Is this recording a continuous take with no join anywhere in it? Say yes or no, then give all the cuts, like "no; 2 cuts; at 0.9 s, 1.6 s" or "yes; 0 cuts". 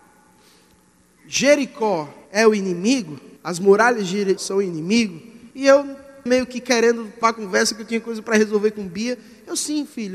no; 6 cuts; at 2.3 s, 3.4 s, 4.4 s, 5.5 s, 6.3 s, 7.2 s